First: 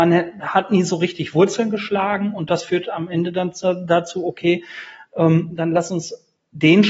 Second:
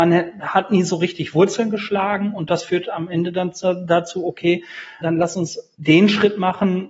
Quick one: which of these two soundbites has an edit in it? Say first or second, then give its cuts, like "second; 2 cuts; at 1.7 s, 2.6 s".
second; 2 cuts; at 5.0 s, 5.7 s